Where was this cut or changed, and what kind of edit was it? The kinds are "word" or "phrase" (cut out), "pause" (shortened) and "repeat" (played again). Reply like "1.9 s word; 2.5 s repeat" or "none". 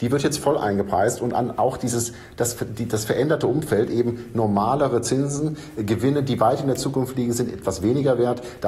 none